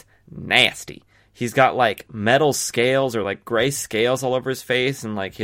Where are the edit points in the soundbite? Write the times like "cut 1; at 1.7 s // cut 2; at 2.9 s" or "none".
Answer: none